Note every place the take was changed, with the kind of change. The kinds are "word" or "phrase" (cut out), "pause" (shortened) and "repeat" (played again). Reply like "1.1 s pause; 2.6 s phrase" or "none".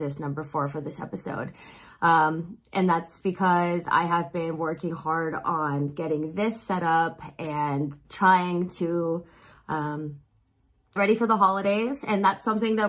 4.9 s word; 8.0 s pause; 11.0 s word